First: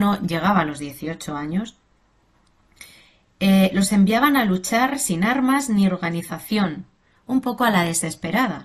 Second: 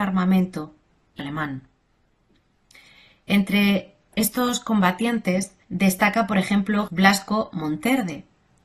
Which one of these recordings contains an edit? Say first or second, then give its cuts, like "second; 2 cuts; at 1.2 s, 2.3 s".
second; 3 cuts; at 1.2 s, 5.6 s, 6.9 s